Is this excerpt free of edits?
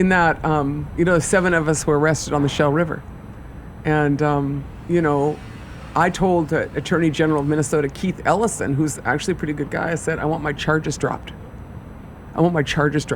yes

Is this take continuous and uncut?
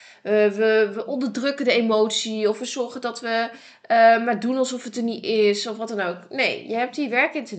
yes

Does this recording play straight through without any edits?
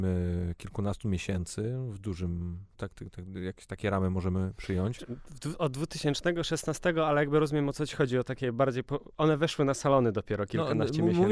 no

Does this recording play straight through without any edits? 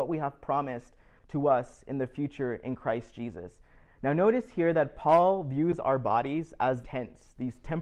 no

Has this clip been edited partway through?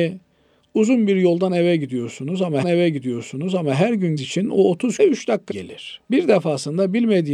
yes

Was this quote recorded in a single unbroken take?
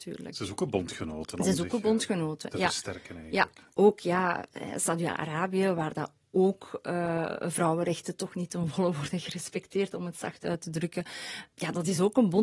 yes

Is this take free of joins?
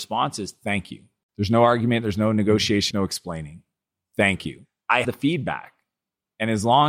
no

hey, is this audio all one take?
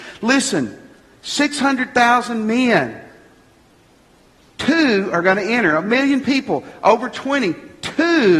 yes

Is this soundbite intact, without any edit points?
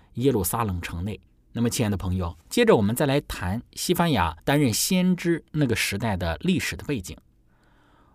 no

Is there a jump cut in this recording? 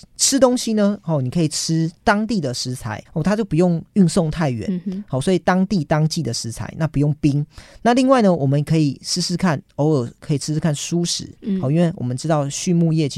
yes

